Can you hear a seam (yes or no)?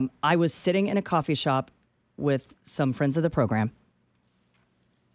no